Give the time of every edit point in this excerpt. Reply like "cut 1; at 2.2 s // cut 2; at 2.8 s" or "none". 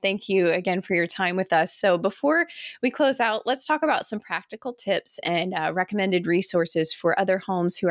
none